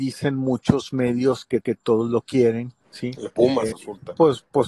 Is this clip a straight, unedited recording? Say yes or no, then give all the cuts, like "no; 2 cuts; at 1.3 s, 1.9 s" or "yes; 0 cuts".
no; 4 cuts; at 1.6 s, 2.8 s, 3.3 s, 3.7 s